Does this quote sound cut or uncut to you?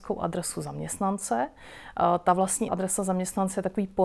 cut